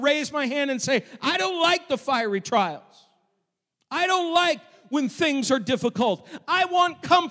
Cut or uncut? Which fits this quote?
uncut